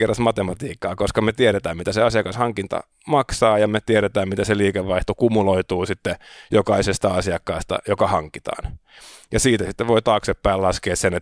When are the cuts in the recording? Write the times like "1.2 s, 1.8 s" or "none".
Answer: none